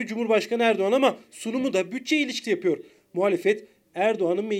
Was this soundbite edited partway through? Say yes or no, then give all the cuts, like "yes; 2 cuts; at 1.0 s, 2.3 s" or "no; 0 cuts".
yes; 1 cut; at 2.4 s